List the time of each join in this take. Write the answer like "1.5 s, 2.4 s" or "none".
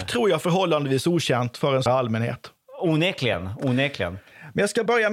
1.9 s